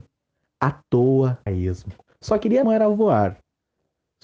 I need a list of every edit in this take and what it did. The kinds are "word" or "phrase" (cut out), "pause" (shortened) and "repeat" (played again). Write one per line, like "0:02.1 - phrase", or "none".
0:01.5 - phrase
0:02.1 - pause
0:02.6 - word